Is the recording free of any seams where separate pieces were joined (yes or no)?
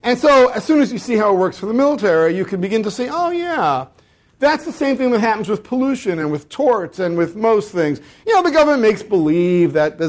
yes